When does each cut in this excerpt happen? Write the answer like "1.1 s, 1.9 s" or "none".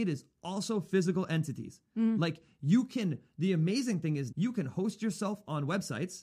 4.3 s